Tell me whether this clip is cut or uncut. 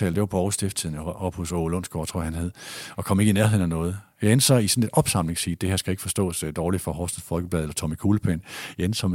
uncut